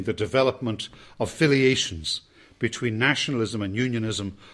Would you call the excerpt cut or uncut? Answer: uncut